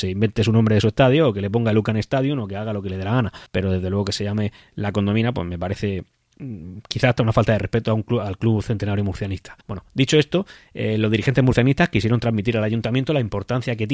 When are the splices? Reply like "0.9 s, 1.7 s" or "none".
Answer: 3.5 s, 9.6 s